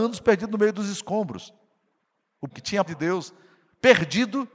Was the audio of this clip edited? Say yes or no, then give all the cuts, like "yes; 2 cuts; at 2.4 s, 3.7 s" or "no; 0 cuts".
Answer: yes; 2 cuts; at 2.5 s, 2.9 s